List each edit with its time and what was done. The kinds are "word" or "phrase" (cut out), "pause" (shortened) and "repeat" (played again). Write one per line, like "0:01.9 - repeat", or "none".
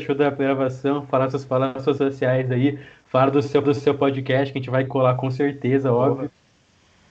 0:02.0 - word
0:03.6 - repeat
0:04.9 - word